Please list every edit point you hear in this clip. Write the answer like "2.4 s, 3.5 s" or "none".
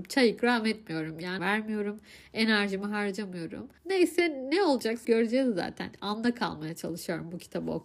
1.4 s, 3.8 s, 5.0 s